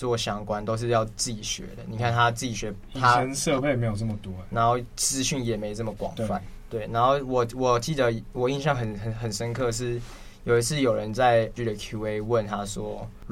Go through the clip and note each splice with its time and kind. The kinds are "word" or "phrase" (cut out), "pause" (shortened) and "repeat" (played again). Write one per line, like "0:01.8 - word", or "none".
0:11.6 - word